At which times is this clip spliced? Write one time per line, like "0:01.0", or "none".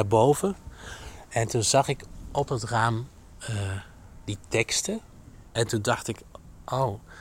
0:05.5